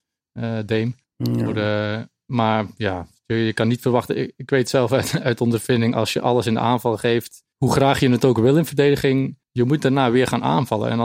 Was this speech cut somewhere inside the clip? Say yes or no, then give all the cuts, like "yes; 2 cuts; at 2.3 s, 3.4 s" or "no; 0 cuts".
yes; 3 cuts; at 1.0 s, 7.5 s, 9.4 s